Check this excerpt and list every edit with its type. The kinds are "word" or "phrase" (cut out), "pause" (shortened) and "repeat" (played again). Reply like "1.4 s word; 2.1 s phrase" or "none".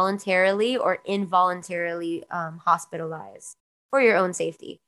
none